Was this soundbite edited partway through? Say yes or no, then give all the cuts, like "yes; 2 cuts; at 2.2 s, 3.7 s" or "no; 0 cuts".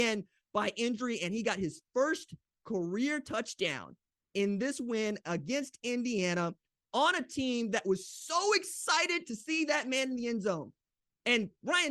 no; 0 cuts